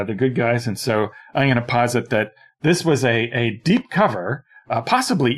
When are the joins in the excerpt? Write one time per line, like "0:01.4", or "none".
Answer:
none

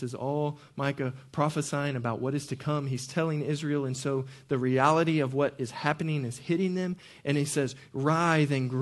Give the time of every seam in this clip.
none

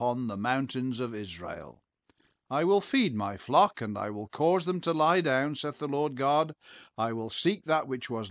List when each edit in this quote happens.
none

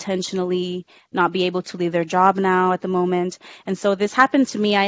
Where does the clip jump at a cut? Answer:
none

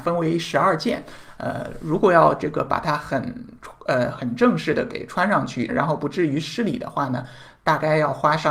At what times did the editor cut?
0:05.7

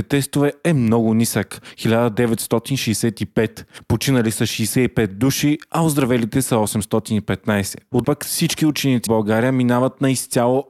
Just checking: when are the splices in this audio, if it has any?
0:08.0
0:09.1

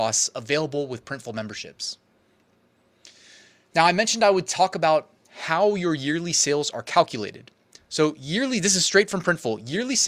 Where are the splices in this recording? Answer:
none

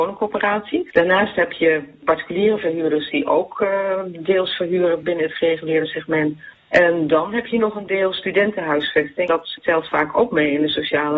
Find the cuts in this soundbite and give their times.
none

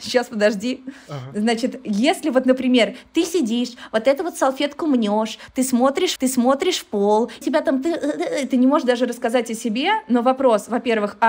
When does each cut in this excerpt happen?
0:06.2
0:07.4

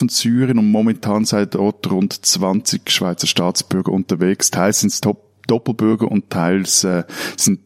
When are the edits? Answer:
none

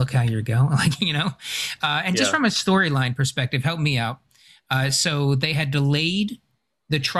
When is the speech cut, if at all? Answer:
none

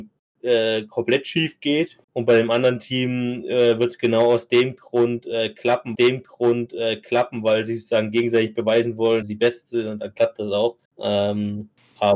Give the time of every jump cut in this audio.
0:02.0
0:06.0
0:09.2
0:10.9

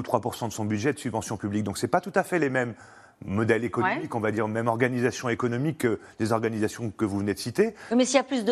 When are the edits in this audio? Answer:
none

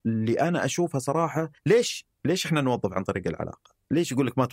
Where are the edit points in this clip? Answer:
0:01.6

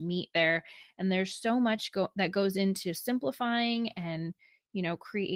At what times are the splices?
none

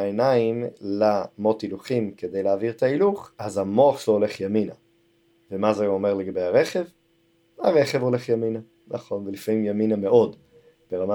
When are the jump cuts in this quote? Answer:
0:03.3

